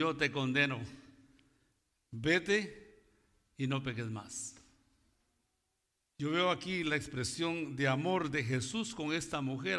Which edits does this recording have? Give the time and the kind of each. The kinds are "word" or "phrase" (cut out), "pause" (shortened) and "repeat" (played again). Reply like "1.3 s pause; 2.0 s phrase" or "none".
none